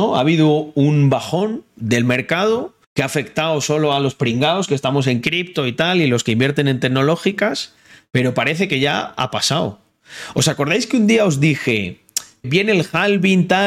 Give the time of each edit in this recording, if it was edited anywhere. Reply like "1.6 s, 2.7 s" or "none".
2.8 s, 12.4 s